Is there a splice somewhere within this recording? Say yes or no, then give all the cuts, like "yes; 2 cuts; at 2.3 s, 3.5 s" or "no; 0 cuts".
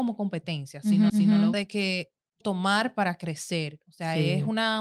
yes; 3 cuts; at 1.1 s, 1.5 s, 2.4 s